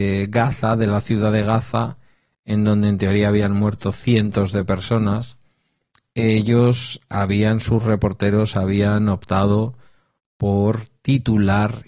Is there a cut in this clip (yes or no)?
no